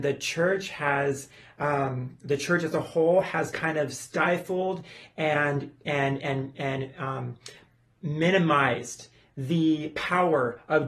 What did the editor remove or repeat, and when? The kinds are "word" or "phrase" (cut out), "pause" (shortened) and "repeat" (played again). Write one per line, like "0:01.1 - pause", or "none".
none